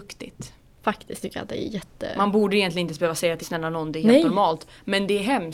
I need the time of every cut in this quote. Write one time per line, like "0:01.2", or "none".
0:01.2
0:03.4